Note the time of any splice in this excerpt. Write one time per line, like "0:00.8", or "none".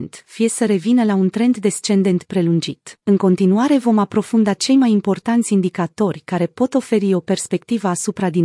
0:03.0